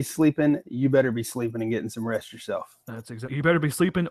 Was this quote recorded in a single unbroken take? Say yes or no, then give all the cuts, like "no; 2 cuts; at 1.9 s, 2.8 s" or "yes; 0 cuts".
no; 1 cut; at 2.8 s